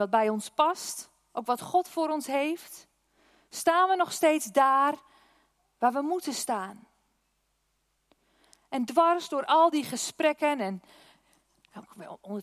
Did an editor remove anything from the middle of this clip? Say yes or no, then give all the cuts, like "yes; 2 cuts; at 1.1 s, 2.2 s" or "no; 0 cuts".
no; 0 cuts